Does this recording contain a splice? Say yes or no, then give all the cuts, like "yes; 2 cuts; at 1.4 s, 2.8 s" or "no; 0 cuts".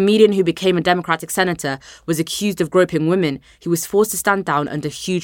no; 0 cuts